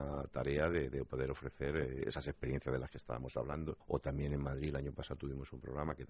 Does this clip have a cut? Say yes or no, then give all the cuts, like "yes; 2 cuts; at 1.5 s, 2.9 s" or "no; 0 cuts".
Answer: yes; 1 cut; at 3.8 s